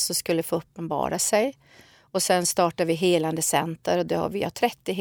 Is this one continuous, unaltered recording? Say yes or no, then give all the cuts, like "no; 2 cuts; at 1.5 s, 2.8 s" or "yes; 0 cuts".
yes; 0 cuts